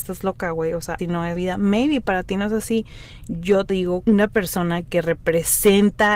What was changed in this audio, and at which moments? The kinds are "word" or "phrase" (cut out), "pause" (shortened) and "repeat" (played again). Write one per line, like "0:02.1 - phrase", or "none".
0:01.0 - word
0:01.4 - word
0:03.7 - word
0:04.0 - word